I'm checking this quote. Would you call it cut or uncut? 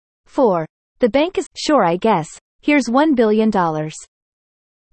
cut